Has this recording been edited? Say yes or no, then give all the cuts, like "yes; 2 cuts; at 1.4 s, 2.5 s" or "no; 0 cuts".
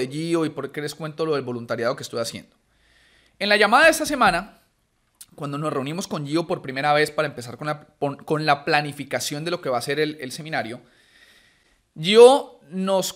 no; 0 cuts